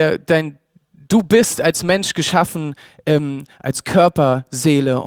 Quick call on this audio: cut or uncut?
uncut